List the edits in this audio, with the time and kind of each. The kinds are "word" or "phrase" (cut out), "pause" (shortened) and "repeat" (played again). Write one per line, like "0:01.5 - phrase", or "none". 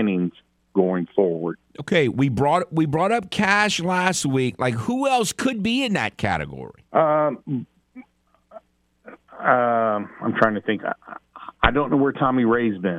0:01.7 - pause
0:06.9 - pause
0:09.3 - pause